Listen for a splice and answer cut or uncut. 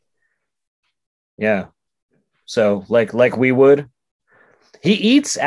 uncut